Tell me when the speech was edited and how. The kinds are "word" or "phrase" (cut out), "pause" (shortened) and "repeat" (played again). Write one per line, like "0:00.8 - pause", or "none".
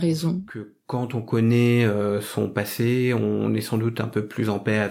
none